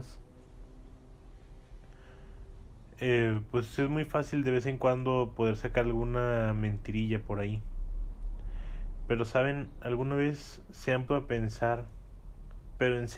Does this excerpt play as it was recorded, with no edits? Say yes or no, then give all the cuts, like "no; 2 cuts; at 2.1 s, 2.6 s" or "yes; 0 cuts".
no; 1 cut; at 11.1 s